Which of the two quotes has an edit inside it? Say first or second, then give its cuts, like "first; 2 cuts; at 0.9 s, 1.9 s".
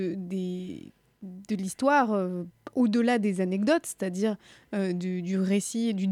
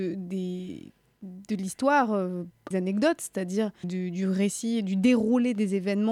second; 2 cuts; at 2.7 s, 3.8 s